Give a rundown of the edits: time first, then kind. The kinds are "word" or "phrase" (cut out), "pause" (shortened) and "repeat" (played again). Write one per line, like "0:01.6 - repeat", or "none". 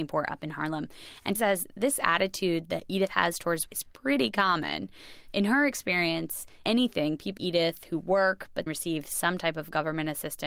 0:01.3 - word
0:03.7 - word
0:06.6 - word
0:07.4 - word
0:08.7 - word